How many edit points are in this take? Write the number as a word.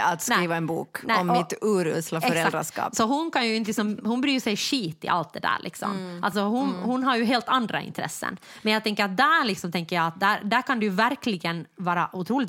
zero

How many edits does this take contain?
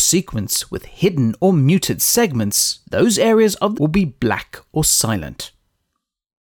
two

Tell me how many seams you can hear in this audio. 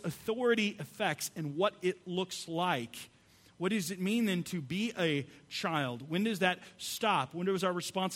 zero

